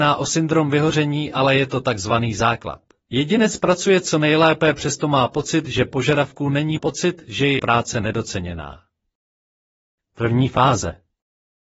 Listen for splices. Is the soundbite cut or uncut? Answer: cut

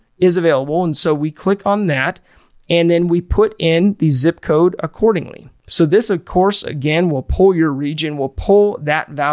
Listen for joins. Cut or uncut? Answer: uncut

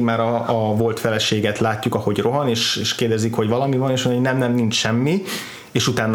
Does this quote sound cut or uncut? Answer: uncut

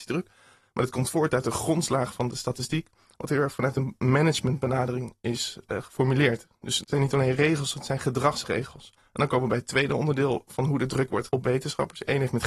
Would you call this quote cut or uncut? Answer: cut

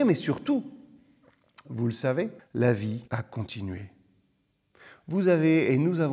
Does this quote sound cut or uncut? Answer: cut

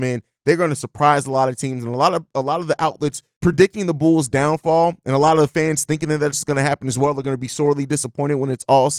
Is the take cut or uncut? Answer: uncut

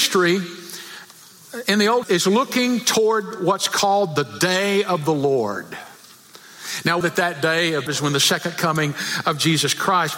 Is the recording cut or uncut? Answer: cut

